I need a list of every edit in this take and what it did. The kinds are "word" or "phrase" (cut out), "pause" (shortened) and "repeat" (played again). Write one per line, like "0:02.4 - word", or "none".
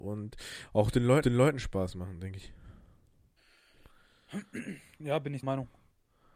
0:01.2 - repeat
0:05.4 - word

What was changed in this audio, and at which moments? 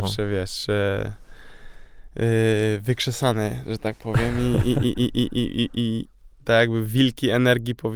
none

